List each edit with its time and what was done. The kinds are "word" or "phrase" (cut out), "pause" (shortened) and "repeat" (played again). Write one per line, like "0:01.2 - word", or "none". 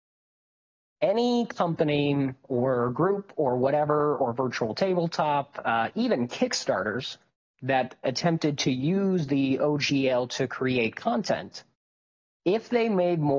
none